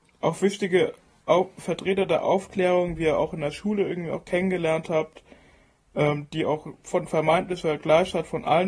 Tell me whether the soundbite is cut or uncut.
uncut